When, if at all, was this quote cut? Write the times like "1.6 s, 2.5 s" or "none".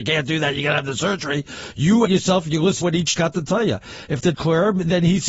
2.1 s, 2.8 s, 3.2 s, 4.3 s